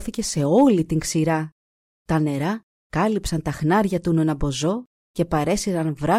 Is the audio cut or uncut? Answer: uncut